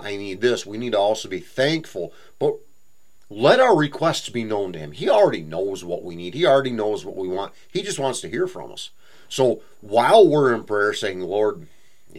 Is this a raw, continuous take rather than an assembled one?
yes; 0 cuts

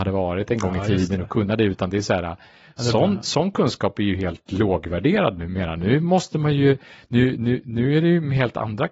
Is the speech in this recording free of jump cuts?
yes; 0 cuts

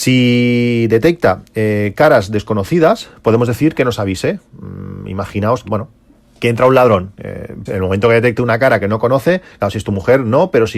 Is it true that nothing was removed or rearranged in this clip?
no; 2 cuts; at 5.6 s, 7.7 s

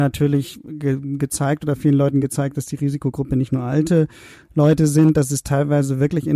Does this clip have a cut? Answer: no; 0 cuts

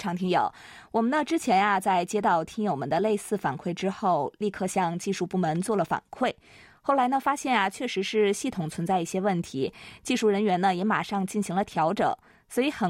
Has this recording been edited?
no; 0 cuts

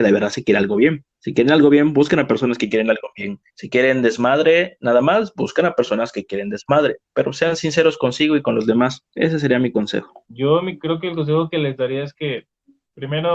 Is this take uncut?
no; 4 cuts; at 1.1 s, 3.5 s, 9.1 s, 10.2 s

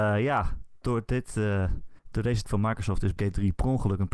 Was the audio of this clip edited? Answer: yes; 3 cuts; at 2.0 s, 2.4 s, 3.2 s

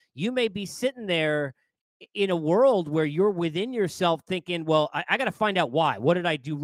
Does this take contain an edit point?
no; 0 cuts

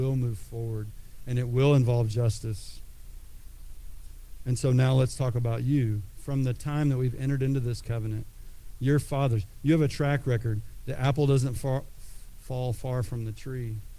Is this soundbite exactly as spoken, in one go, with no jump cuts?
no; 1 cut; at 11.6 s

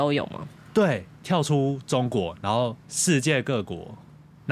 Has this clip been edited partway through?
yes; 1 cut; at 2.8 s

